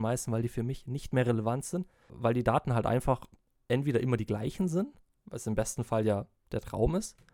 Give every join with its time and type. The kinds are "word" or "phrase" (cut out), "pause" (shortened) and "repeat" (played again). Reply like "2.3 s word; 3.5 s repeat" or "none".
none

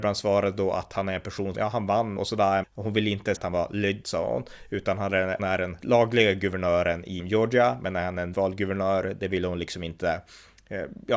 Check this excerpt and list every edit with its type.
1.5 s word; 2.2 s word; 2.6 s word; 3.4 s word; 4.0 s word; 5.4 s word; 5.8 s word; 7.2 s word; 8.3 s word

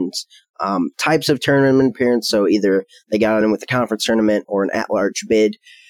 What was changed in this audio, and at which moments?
none

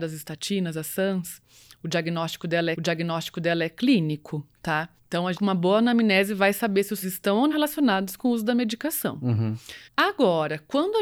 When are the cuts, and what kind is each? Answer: 2.7 s repeat; 5.0 s pause; 5.3 s word; 7.0 s word; 7.5 s word; 9.8 s pause

